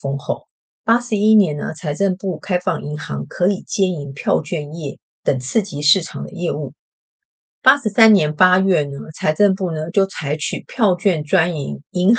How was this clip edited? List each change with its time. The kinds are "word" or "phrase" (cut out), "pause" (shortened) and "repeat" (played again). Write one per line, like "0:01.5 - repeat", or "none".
none